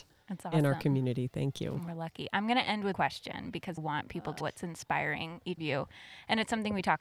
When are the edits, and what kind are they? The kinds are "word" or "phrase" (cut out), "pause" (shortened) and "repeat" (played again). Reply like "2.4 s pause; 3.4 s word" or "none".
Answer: 2.9 s word; 3.8 s word; 4.4 s word; 5.6 s word